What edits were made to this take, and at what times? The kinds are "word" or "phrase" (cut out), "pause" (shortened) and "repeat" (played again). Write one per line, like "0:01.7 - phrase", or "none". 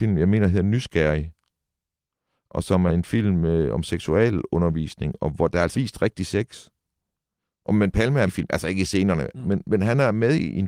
0:02.9 - word
0:05.7 - word
0:08.3 - word
0:09.3 - word